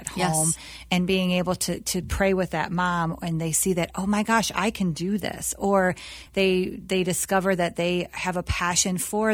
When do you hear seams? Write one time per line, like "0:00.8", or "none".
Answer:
none